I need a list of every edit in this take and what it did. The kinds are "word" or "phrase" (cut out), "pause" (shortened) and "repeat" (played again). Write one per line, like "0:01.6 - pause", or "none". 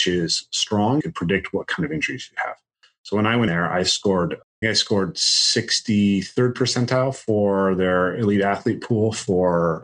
0:01.0 - word
0:03.5 - word
0:04.6 - word